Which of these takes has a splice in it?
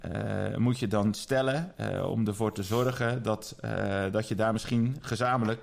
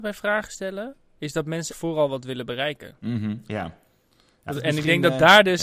second; 2 cuts; at 1.7 s, 4.5 s

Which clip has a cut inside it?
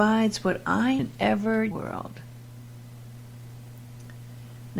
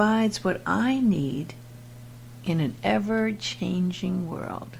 first; 2 cuts; at 1.0 s, 1.7 s

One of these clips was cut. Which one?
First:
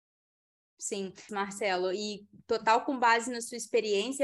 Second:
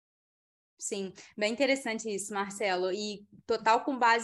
first; 1 cut; at 1.3 s

